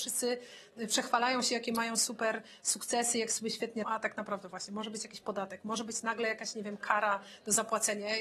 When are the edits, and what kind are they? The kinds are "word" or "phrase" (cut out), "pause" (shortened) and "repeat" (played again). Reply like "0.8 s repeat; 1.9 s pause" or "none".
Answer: 3.8 s word

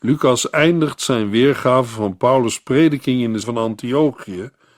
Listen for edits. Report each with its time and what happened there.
3.4 s word

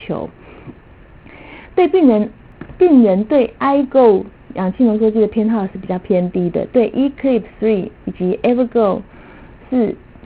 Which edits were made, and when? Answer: none

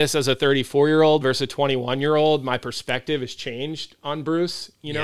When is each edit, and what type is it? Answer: none

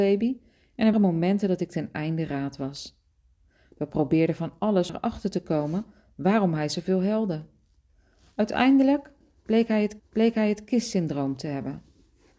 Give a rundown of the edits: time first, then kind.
0.9 s word; 4.9 s word; 10.0 s repeat

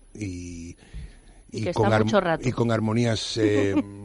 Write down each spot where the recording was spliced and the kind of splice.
none

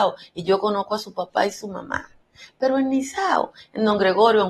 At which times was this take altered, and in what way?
none

